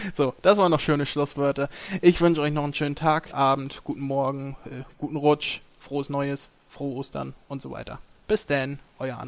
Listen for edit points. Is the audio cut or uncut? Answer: cut